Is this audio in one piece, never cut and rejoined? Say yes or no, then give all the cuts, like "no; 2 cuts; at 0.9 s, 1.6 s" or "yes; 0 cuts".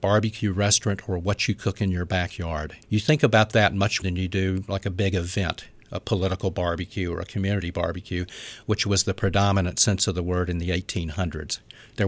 no; 2 cuts; at 2.8 s, 4.0 s